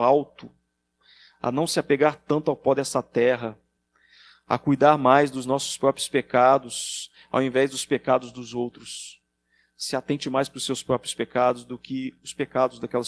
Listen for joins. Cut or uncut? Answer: uncut